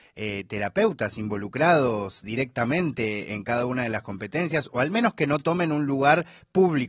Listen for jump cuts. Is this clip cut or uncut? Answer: cut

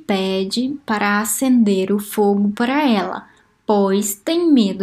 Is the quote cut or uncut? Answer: uncut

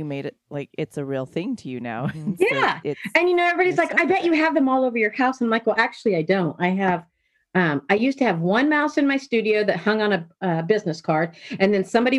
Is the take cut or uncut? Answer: uncut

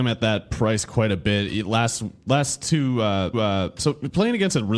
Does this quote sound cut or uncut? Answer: cut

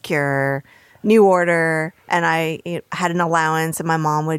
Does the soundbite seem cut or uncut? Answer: cut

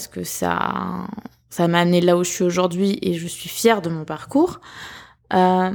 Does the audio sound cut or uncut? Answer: uncut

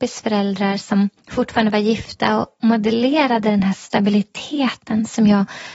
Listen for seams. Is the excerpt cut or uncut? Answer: cut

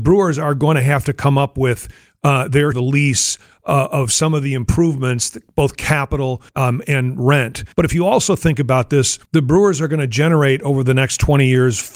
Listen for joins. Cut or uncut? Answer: cut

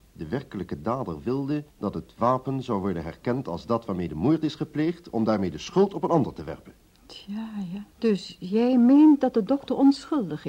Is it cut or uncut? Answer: cut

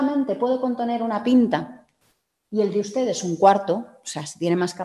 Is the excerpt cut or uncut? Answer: uncut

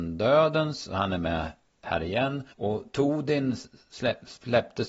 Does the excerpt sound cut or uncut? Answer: cut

